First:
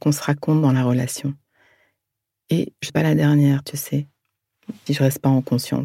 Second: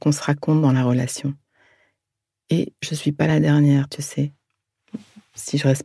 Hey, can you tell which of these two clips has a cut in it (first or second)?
first